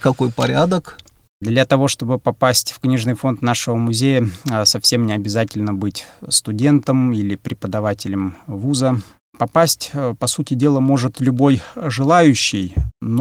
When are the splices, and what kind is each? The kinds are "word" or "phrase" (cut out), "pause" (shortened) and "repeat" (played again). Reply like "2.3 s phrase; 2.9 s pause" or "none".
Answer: none